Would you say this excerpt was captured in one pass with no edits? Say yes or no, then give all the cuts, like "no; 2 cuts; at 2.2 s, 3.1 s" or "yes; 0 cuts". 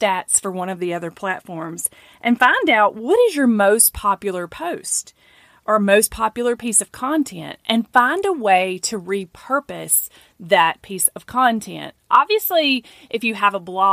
yes; 0 cuts